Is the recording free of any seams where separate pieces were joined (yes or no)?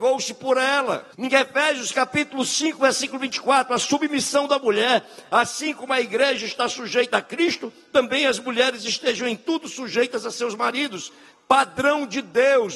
no